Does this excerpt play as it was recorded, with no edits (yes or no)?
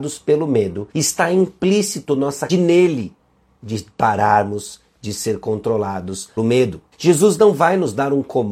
no